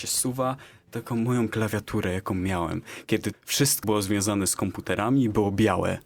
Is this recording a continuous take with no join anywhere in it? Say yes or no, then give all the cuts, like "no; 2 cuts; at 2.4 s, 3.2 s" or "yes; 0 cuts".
no; 3 cuts; at 1.5 s, 3.3 s, 3.8 s